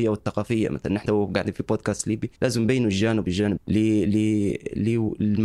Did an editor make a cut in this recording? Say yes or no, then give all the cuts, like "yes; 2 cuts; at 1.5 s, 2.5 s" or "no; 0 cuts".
yes; 4 cuts; at 1.0 s, 2.3 s, 3.2 s, 3.6 s